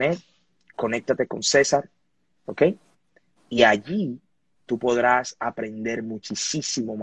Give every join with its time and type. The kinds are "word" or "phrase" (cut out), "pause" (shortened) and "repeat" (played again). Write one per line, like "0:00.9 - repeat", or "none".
none